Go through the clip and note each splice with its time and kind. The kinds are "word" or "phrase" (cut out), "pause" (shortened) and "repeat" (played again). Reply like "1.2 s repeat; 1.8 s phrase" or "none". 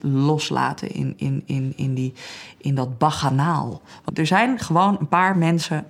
none